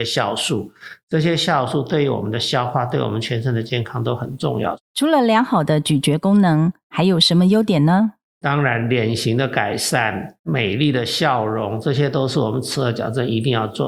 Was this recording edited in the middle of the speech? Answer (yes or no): yes